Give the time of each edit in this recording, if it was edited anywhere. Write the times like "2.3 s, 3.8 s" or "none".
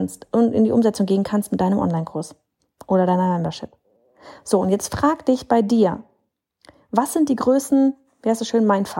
none